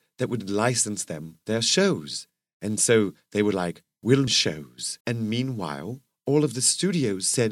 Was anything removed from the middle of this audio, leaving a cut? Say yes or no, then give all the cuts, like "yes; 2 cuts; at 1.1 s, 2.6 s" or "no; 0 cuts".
yes; 2 cuts; at 4.3 s, 5.0 s